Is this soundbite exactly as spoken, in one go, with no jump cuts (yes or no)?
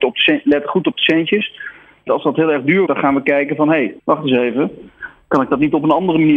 no